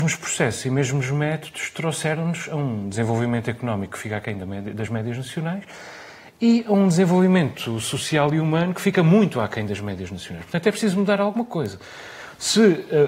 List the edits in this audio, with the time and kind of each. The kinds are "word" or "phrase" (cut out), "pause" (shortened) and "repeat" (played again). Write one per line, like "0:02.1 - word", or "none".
none